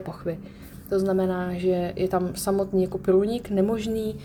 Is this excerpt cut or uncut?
uncut